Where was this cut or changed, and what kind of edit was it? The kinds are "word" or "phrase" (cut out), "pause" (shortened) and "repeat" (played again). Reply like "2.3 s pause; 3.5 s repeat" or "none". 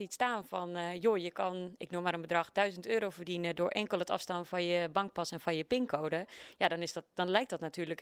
none